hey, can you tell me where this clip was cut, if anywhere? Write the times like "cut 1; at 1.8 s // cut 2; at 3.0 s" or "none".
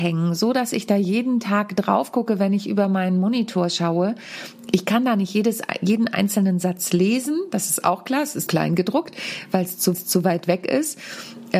cut 1; at 8.5 s // cut 2; at 9.9 s